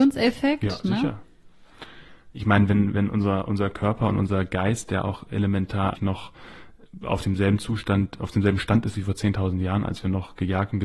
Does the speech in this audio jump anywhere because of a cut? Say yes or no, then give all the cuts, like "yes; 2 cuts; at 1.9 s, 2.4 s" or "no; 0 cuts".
yes; 1 cut; at 5.9 s